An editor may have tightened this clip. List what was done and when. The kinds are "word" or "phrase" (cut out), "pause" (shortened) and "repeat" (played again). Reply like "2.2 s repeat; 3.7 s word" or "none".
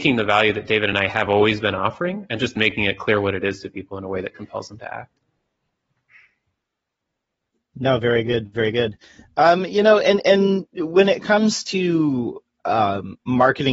none